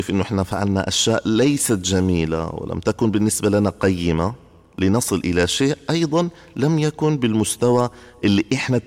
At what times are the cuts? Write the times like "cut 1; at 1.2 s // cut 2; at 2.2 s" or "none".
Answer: none